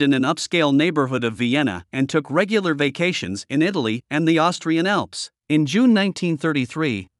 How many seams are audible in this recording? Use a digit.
1